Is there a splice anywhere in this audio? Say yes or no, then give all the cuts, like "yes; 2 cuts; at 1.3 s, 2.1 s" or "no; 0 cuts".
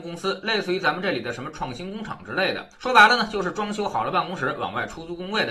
yes; 1 cut; at 2.7 s